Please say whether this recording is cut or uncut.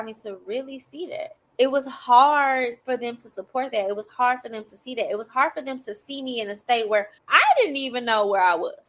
cut